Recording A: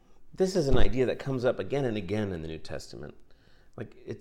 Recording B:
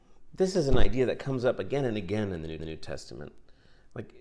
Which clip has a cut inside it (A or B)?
B